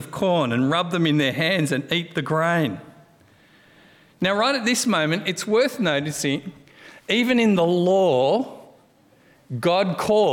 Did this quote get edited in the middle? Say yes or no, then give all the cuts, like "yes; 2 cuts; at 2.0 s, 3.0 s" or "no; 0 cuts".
no; 0 cuts